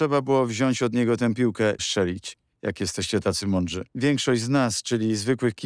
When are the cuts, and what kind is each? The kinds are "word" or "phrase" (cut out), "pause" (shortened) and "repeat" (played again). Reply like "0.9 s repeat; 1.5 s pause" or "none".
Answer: 1.8 s phrase; 3.9 s pause